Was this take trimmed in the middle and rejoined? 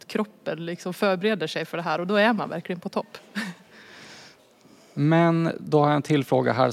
no; 0 cuts

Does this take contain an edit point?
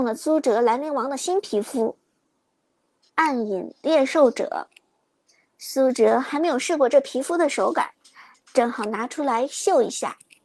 no; 0 cuts

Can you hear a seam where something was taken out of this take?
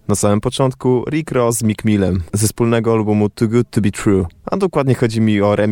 no; 0 cuts

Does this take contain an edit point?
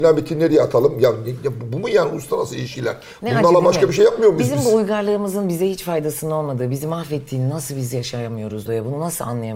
yes; 1 cut; at 8.7 s

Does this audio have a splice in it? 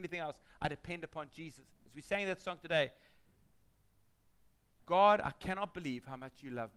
yes; 1 cut; at 4.8 s

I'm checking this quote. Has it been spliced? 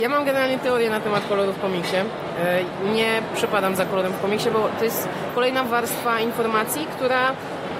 no; 0 cuts

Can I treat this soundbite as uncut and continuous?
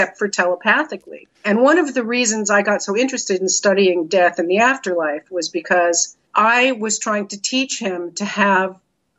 no; 2 cuts; at 1.3 s, 6.3 s

